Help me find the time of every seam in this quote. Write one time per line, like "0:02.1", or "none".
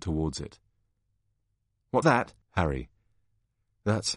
0:02.0
0:02.4